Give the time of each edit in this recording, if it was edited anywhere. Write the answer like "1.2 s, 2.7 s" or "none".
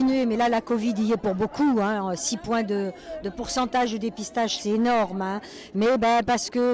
none